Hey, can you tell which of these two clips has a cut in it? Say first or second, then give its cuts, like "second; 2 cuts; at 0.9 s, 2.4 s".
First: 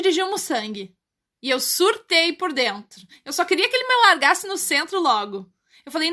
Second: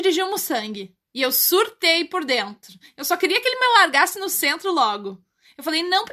second; 1 cut; at 1.0 s